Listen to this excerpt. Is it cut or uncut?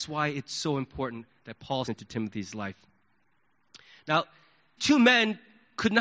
cut